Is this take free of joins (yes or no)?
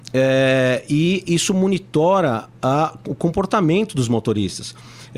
yes